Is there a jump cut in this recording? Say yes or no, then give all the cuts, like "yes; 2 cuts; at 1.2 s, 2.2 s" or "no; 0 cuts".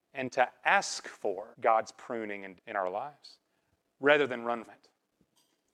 yes; 3 cuts; at 1.5 s, 2.6 s, 4.7 s